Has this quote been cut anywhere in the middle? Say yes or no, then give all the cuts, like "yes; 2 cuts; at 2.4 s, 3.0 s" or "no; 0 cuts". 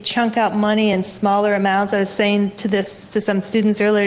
no; 0 cuts